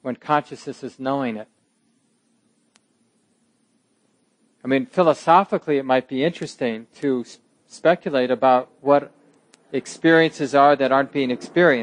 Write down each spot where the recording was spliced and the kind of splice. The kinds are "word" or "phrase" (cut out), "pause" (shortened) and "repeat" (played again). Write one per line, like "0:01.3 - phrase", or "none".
none

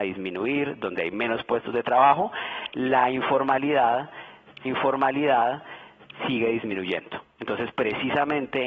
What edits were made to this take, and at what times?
0:04.7 - repeat

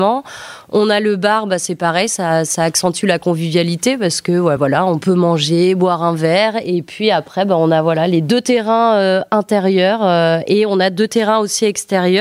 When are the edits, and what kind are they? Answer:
none

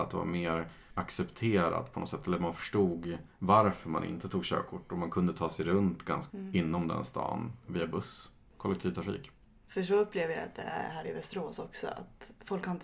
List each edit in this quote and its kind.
0:06.3 - word
0:07.7 - word

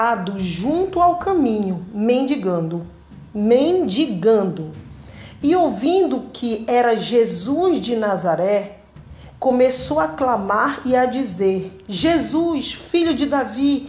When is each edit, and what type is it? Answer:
0:03.3 - pause

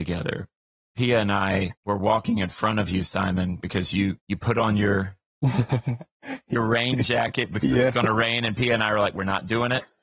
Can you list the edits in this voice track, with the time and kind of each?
0:01.8 - pause
0:04.2 - pause

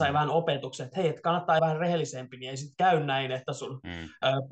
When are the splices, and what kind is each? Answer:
0:01.6 - phrase

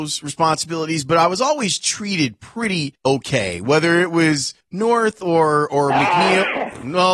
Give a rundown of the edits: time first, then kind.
0:03.0 - pause
0:04.6 - pause

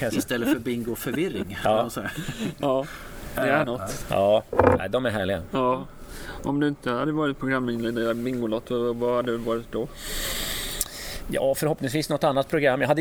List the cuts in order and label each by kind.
0:03.6 - word

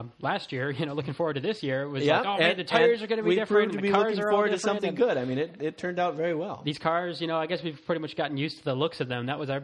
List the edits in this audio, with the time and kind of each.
none

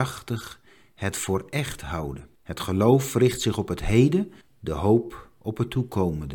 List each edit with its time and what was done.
0:02.4 - pause
0:04.4 - pause

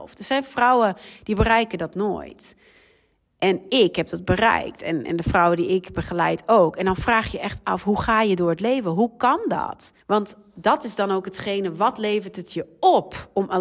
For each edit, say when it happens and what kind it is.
0:10.0 - pause

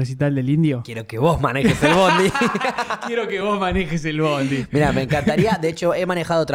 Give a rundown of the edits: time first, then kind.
none

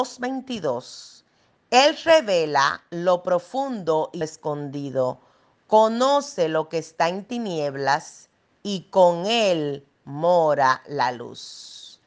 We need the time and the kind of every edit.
0:04.2 - word

